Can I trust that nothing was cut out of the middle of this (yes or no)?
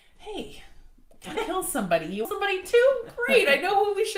no